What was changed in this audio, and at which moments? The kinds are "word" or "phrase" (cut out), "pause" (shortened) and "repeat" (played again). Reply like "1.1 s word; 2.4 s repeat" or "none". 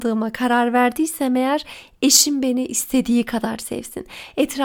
none